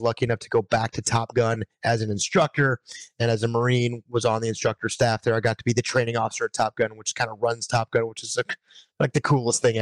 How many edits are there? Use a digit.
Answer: 0